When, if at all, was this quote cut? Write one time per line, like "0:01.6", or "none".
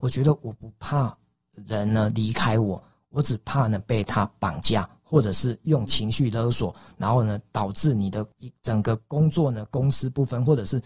0:08.3